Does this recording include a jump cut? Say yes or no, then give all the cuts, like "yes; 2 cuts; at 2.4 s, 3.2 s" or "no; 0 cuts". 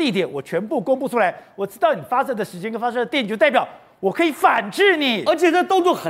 no; 0 cuts